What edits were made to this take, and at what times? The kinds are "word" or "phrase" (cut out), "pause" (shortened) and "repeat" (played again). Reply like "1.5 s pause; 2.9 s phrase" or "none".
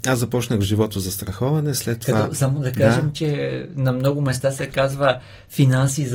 none